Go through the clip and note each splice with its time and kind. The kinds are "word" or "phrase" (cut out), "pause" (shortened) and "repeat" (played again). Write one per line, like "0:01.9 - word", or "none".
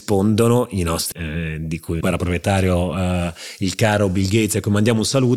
0:01.1 - word
0:02.0 - phrase